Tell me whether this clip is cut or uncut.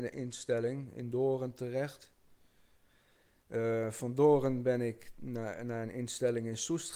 uncut